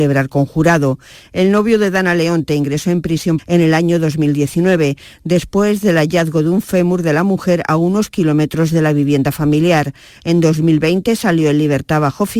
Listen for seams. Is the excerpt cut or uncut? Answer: cut